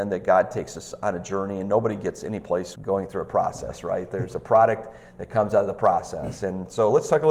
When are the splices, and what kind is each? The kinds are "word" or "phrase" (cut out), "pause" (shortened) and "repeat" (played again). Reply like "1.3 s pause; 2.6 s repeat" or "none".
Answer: 2.7 s word